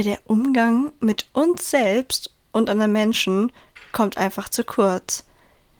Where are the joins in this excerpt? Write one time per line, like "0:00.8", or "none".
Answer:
none